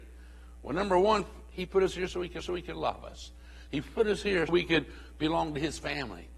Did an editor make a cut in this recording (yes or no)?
yes